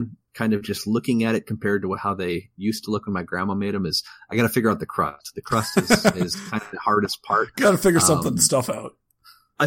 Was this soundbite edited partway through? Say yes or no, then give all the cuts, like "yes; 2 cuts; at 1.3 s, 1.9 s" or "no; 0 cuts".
no; 0 cuts